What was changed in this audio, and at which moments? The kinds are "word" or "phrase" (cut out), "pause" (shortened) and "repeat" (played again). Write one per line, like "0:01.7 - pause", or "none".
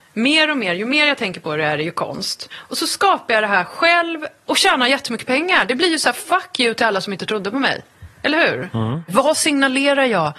0:08.1 - pause